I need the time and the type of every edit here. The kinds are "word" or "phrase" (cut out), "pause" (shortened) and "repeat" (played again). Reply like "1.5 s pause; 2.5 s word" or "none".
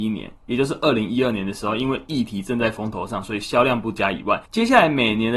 4.5 s pause